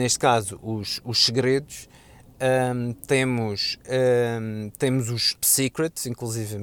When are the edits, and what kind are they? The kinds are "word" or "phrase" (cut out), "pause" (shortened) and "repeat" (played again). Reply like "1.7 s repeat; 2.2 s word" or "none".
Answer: 5.4 s word